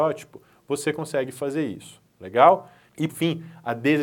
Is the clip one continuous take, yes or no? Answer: no